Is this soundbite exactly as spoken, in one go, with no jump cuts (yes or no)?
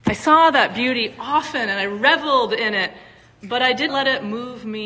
no